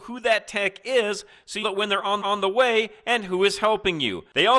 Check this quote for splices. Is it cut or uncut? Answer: cut